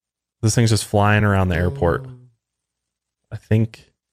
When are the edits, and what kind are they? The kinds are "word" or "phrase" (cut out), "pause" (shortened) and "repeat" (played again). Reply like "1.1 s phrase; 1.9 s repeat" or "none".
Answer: none